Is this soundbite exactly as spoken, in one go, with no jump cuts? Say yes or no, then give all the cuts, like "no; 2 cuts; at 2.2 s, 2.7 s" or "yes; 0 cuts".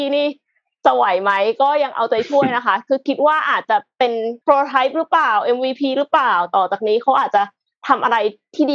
no; 1 cut; at 4.4 s